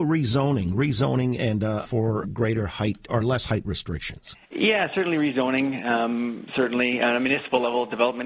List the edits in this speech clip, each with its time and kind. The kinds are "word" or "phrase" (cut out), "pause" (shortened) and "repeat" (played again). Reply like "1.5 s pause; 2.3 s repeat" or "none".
1.8 s word; 2.2 s word; 3.1 s word; 4.4 s pause